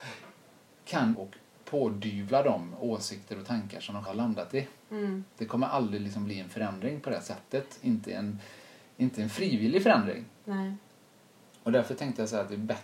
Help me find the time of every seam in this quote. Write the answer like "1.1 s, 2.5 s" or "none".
1.1 s, 4.1 s, 5.3 s